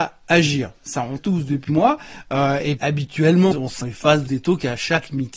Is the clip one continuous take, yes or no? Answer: no